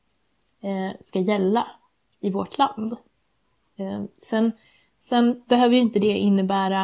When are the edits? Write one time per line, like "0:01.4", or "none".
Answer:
none